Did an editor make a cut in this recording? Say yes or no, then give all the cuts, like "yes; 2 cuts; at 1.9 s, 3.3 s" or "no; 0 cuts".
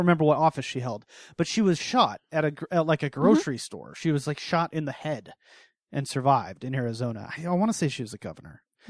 no; 0 cuts